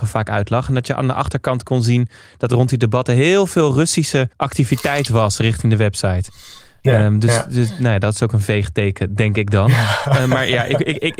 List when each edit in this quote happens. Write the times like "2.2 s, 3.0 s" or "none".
2.5 s, 4.3 s